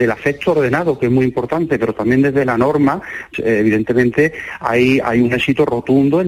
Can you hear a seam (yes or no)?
yes